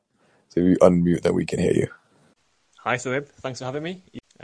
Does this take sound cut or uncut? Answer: uncut